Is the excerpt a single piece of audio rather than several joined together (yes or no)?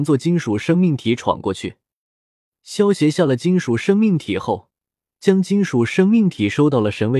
yes